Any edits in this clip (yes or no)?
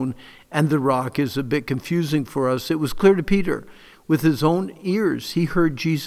no